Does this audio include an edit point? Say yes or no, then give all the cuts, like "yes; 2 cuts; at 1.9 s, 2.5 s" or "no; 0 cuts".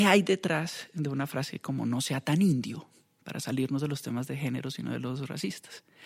no; 0 cuts